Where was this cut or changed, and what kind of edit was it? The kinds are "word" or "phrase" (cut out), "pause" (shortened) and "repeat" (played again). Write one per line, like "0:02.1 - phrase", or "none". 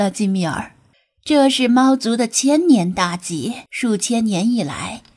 0:00.9 - pause
0:03.7 - pause